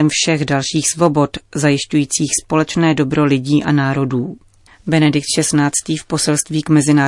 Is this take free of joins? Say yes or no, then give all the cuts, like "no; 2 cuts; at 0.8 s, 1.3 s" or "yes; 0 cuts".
yes; 0 cuts